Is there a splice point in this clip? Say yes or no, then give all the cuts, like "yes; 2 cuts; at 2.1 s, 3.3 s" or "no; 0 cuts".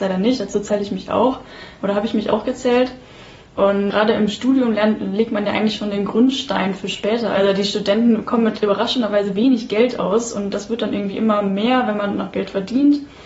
no; 0 cuts